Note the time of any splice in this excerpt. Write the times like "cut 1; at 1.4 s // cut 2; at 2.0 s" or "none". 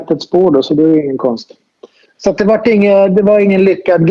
cut 1; at 2.1 s